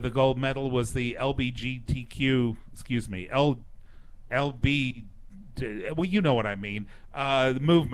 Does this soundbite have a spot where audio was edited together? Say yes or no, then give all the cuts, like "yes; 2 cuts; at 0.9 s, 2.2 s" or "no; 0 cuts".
no; 0 cuts